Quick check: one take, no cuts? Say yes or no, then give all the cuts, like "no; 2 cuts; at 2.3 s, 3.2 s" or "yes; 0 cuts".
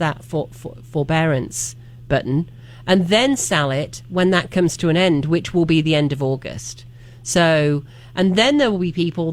yes; 0 cuts